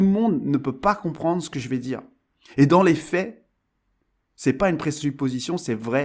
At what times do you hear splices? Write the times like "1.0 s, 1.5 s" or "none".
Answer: none